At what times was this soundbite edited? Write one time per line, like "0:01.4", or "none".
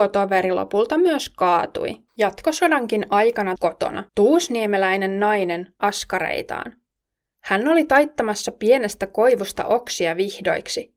0:02.1
0:03.6
0:04.1
0:05.8